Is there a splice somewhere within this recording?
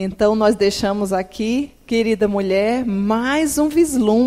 yes; 1 cut; at 1.8 s

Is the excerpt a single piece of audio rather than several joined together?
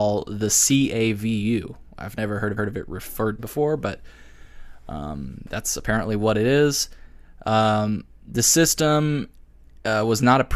no; 2 cuts; at 2.6 s, 3.4 s

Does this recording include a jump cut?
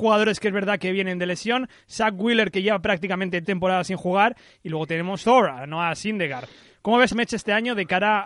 yes; 3 cuts; at 3.4 s, 5.2 s, 7.1 s

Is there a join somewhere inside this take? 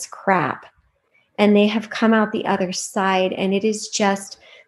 no; 0 cuts

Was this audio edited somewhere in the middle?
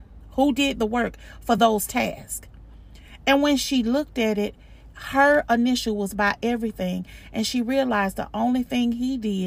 no; 0 cuts

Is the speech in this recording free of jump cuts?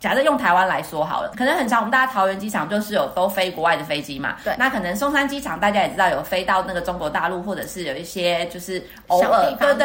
no; 1 cut; at 1.3 s

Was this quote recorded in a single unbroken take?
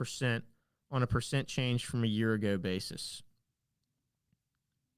yes; 0 cuts

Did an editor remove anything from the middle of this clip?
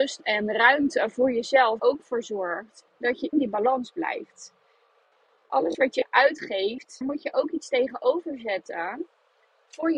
yes; 4 cuts; at 1.8 s, 2.9 s, 3.3 s, 7.0 s

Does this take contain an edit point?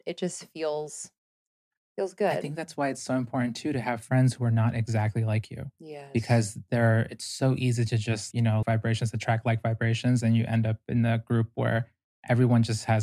yes; 2 cuts; at 8.3 s, 8.6 s

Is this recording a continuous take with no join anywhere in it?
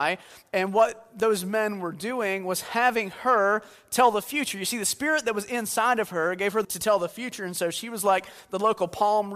no; 1 cut; at 6.6 s

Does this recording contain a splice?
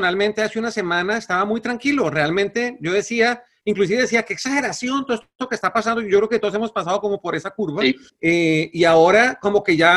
yes; 1 cut; at 8.1 s

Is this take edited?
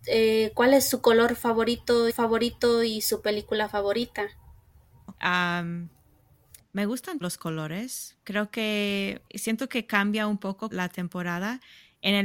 yes; 5 cuts; at 2.1 s, 5.2 s, 7.2 s, 9.3 s, 10.7 s

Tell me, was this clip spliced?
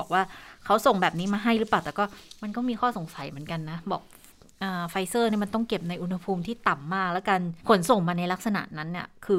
yes; 1 cut; at 7.6 s

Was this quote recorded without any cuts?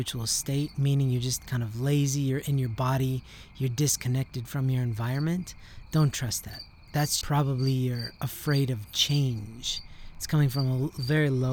no; 1 cut; at 7.2 s

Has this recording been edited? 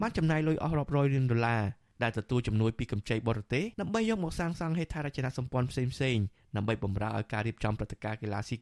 yes; 1 cut; at 3.7 s

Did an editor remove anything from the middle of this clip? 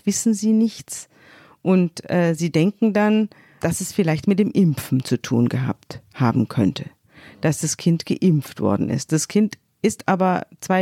no; 0 cuts

